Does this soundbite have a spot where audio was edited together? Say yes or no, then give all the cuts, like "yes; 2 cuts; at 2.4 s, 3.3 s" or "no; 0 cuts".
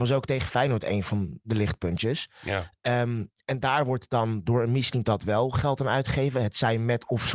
no; 0 cuts